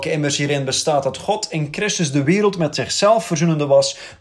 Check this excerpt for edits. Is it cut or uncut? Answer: uncut